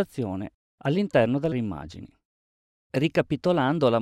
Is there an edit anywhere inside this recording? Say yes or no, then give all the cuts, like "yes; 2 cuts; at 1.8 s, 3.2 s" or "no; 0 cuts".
yes; 1 cut; at 1.5 s